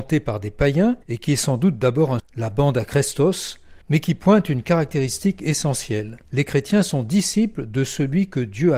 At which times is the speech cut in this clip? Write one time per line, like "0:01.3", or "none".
0:01.0
0:02.2
0:03.8
0:06.2